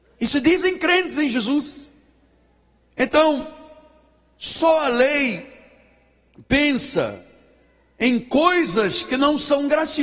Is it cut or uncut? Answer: uncut